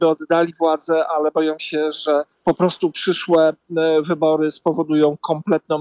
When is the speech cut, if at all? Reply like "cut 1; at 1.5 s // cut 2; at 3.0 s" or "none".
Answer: cut 1; at 2.3 s